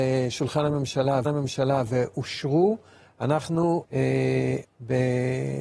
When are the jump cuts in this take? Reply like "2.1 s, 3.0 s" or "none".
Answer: 1.2 s, 3.8 s, 4.6 s